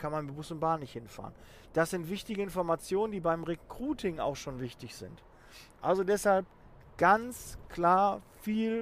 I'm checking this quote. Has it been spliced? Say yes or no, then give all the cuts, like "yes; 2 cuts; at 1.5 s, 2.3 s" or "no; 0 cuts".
no; 0 cuts